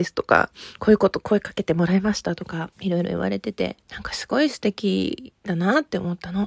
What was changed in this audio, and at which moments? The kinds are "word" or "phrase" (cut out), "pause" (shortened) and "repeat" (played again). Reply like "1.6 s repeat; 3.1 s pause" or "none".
2.7 s pause; 3.8 s pause; 5.4 s pause